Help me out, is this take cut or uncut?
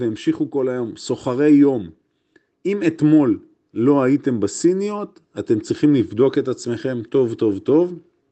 uncut